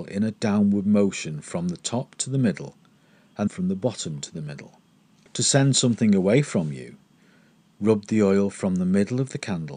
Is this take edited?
yes; 1 cut; at 3.5 s

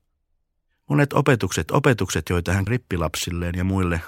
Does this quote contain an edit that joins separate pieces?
yes; 2 cuts; at 1.7 s, 2.7 s

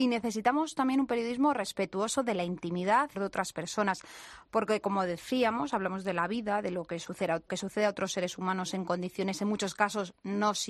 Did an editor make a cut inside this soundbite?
yes; 2 cuts; at 3.1 s, 7.5 s

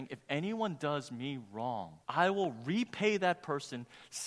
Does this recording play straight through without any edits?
no; 1 cut; at 2.0 s

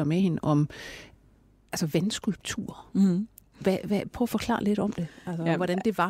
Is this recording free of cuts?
yes; 0 cuts

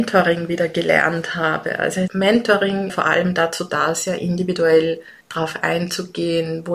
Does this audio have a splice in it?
yes; 3 cuts; at 2.1 s, 2.9 s, 5.2 s

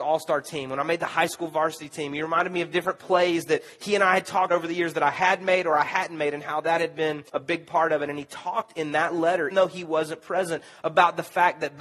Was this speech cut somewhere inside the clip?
yes; 3 cuts; at 4.5 s, 7.3 s, 9.5 s

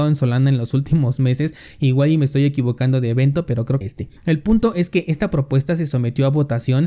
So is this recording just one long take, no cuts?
no; 2 cuts; at 3.8 s, 4.2 s

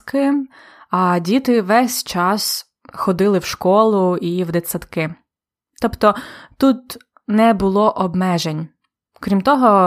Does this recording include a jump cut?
no; 0 cuts

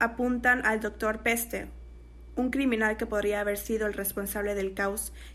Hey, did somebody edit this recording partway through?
no; 0 cuts

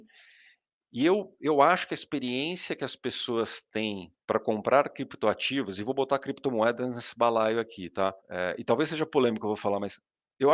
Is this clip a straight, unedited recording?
no; 2 cuts; at 4.2 s, 8.2 s

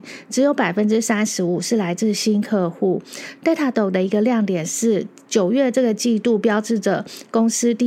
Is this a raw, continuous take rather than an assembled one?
yes; 0 cuts

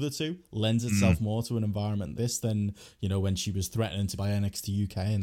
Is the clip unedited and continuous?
no; 2 cuts; at 2.1 s, 4.2 s

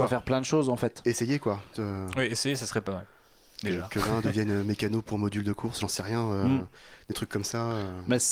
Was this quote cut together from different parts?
yes; 1 cut; at 1.7 s

